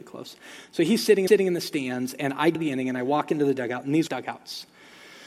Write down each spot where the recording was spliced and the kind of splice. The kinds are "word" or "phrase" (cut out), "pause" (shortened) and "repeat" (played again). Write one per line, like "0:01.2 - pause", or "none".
0:01.3 - repeat
0:02.6 - word
0:04.1 - phrase

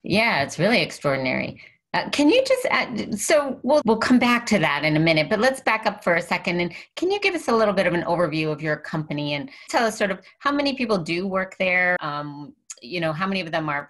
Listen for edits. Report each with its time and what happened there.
0:03.8 - word
0:09.7 - word
0:12.0 - word

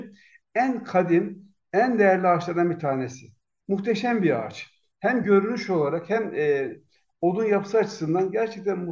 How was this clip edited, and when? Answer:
none

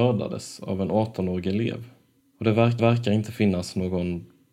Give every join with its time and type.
0:02.2 - pause
0:02.8 - repeat

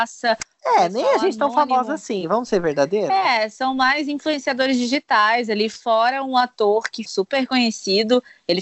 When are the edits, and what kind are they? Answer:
0:07.1 - phrase

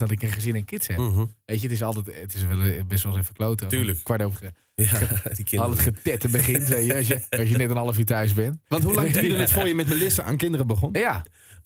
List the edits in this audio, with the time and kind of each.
0:04.3 - phrase

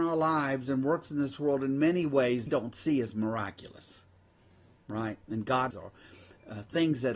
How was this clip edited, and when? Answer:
0:02.5 - phrase
0:05.2 - pause
0:05.7 - word

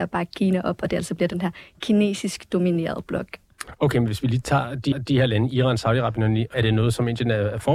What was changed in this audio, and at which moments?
0:04.9 - repeat
0:06.5 - phrase

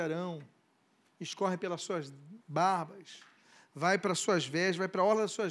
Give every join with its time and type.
0:02.4 - pause

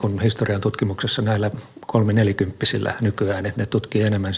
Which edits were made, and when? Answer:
none

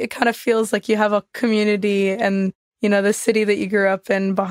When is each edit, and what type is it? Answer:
none

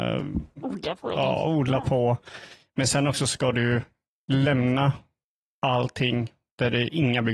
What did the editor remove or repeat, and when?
none

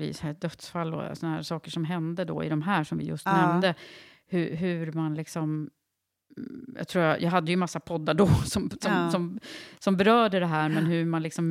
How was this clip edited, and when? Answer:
none

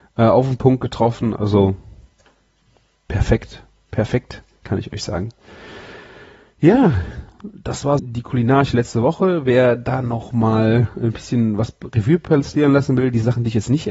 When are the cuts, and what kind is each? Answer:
0:08.0 - word

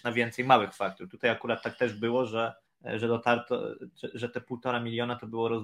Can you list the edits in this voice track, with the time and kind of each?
0:02.7 - pause

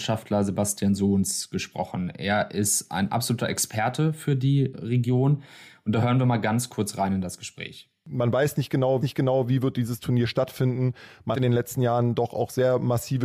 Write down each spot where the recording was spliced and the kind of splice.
0:04.7 - word
0:09.0 - repeat
0:11.3 - word

